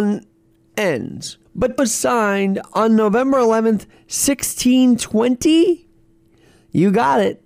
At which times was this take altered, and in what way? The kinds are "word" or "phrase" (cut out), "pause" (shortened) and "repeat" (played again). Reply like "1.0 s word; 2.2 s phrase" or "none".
1.5 s pause; 1.8 s phrase